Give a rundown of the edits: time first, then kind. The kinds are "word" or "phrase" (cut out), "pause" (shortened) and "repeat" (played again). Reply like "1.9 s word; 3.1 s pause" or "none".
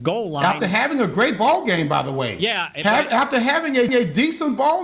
3.9 s repeat